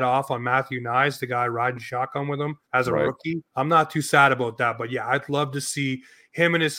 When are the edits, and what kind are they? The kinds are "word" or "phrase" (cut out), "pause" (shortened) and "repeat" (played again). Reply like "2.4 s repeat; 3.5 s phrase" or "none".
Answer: 2.6 s pause; 3.5 s pause